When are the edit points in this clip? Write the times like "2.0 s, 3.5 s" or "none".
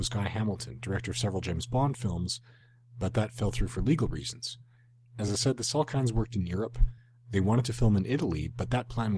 none